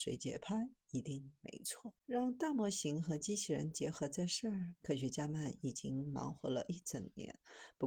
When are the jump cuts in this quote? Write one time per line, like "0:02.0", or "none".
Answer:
0:02.0